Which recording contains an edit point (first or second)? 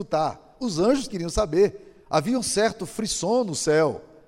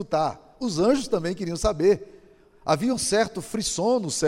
first